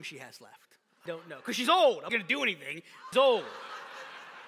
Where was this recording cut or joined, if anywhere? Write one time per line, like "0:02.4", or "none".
0:01.1
0:02.1
0:03.1